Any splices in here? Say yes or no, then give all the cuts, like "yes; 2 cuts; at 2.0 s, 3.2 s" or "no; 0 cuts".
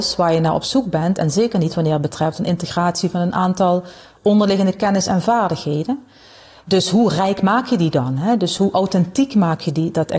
no; 0 cuts